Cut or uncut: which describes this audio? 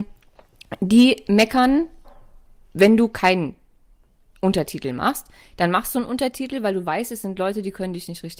uncut